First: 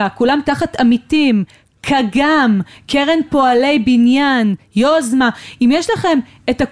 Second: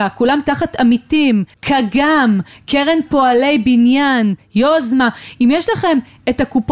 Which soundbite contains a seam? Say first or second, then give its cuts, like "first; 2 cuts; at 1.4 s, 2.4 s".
second; 1 cut; at 1.5 s